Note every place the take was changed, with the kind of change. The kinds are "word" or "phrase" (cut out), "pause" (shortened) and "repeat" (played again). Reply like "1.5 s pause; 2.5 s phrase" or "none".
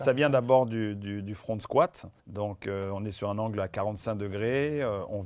2.2 s pause